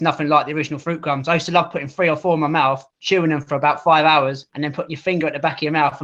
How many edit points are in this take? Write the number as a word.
two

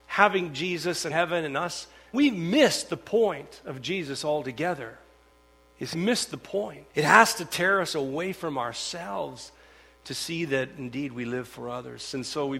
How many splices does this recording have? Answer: five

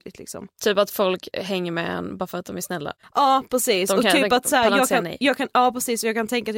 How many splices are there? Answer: one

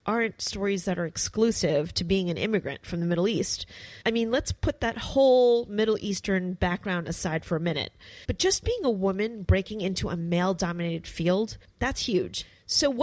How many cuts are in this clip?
two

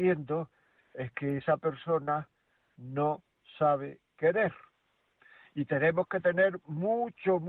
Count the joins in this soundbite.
zero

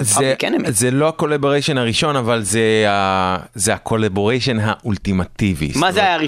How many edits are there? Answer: zero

